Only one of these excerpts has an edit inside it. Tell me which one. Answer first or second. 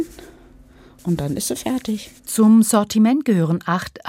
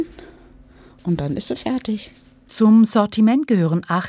first